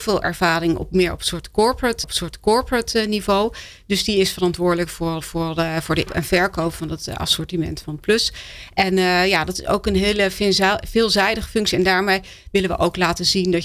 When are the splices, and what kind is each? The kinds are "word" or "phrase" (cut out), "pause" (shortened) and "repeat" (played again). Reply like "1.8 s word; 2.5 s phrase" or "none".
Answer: 2.0 s repeat; 5.2 s repeat; 6.1 s word; 7.8 s word